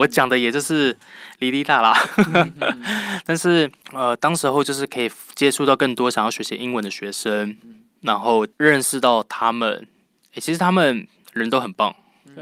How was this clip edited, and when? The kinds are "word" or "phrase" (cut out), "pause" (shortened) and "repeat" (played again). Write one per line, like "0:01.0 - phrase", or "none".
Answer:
none